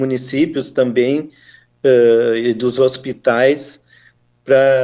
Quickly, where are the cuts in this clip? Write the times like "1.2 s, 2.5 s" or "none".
none

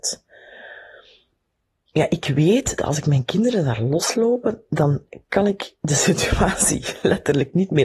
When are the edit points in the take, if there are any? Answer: 4.1 s

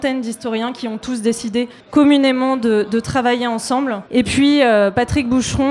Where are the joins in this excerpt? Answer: 1.8 s, 4.1 s

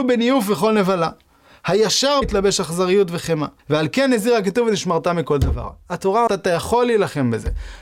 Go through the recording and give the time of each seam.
2.2 s, 3.6 s, 6.3 s

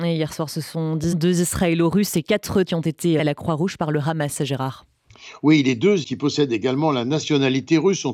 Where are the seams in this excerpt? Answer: 1.1 s, 2.6 s, 3.2 s, 6.0 s

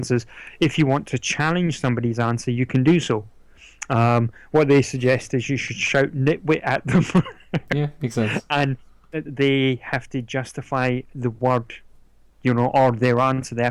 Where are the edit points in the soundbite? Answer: 9.2 s

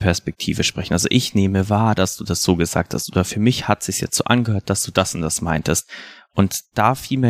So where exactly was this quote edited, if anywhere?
none

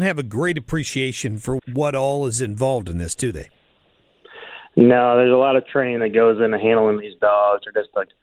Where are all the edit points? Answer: 1.6 s

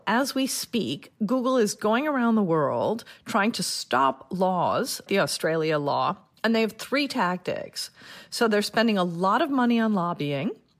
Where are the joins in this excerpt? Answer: 5.1 s

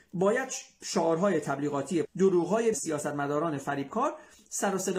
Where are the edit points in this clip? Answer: 2.0 s, 2.7 s

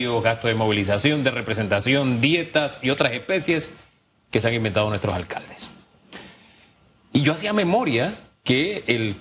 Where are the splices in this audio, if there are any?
none

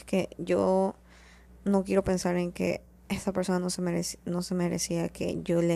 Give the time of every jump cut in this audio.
none

